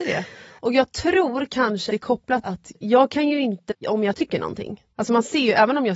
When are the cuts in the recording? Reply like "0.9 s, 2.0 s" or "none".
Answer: 1.9 s, 2.4 s, 3.7 s, 4.9 s